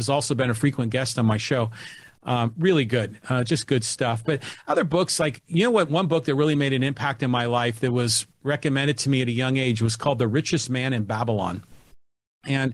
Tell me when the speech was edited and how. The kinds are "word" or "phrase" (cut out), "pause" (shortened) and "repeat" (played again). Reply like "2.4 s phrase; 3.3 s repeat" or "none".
none